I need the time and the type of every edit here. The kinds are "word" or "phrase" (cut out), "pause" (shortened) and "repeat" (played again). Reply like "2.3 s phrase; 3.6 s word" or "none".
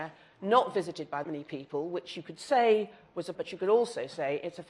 1.2 s word; 3.3 s word